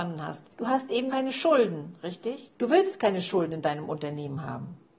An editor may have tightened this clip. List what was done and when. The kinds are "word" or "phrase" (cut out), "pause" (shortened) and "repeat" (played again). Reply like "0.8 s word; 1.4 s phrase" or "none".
1.1 s word